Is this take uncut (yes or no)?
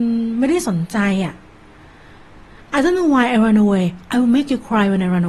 yes